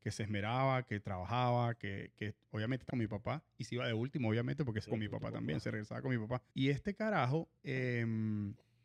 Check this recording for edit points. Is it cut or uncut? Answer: cut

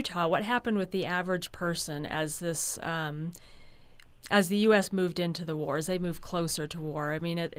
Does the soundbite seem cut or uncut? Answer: uncut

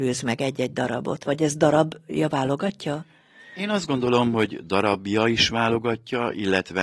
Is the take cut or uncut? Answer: uncut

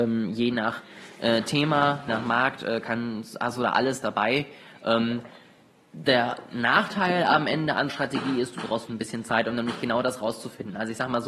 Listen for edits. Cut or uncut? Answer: cut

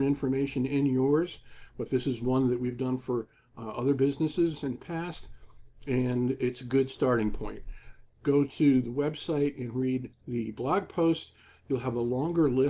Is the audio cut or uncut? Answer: uncut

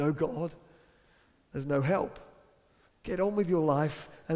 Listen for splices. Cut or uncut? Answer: uncut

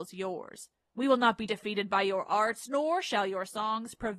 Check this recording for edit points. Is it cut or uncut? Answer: uncut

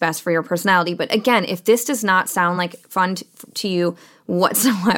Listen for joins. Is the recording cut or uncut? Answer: uncut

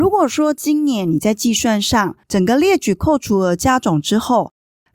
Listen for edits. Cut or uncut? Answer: cut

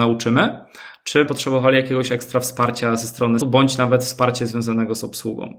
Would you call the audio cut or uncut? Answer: cut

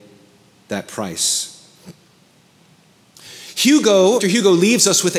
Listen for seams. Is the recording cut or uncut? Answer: cut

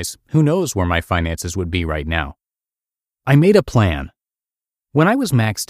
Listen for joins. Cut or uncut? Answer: uncut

